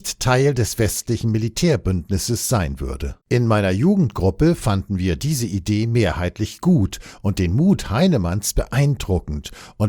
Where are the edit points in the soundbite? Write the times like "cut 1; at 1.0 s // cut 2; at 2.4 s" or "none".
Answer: cut 1; at 3.2 s